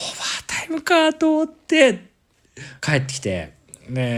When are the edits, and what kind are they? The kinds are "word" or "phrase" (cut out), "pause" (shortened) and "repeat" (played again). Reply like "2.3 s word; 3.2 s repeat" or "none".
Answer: 2.8 s pause